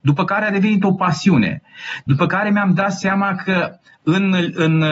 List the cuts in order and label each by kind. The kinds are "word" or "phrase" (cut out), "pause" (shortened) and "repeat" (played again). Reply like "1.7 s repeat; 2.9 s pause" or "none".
none